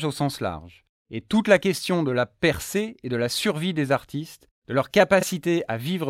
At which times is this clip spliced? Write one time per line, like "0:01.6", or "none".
none